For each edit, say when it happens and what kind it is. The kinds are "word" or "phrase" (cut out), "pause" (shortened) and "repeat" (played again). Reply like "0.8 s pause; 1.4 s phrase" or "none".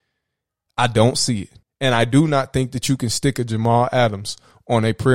1.6 s pause